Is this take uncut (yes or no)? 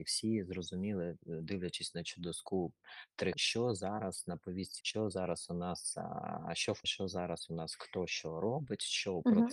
no